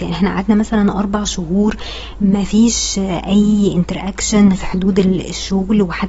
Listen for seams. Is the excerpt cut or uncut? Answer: cut